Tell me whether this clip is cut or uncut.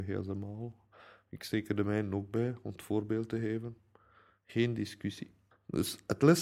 uncut